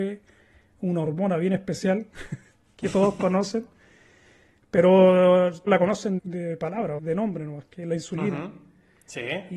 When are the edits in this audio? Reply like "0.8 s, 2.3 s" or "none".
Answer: 5.7 s, 6.2 s, 7.0 s

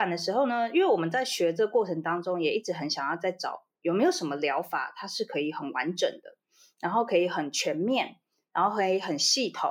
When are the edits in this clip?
none

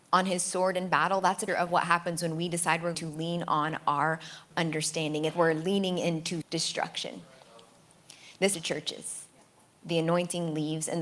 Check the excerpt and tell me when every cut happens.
1.5 s, 2.9 s, 4.5 s, 5.3 s, 6.4 s, 8.5 s

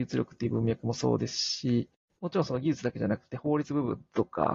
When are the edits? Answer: none

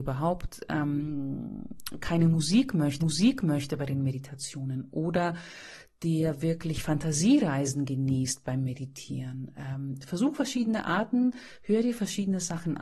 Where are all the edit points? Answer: 3.0 s

